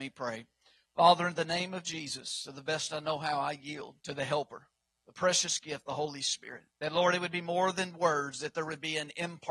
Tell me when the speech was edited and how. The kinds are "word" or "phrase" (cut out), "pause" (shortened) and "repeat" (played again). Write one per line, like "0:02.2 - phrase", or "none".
0:04.0 - pause
0:04.9 - pause
0:06.7 - pause